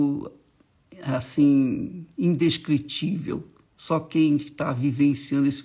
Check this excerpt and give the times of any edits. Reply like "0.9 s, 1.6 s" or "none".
none